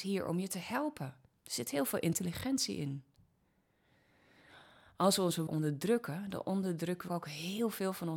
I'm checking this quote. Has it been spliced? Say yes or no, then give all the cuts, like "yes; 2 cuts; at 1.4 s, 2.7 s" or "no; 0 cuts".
yes; 2 cuts; at 5.5 s, 7.1 s